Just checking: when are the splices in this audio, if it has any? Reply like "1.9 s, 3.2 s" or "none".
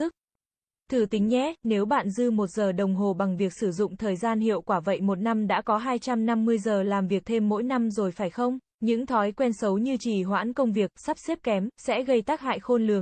8.6 s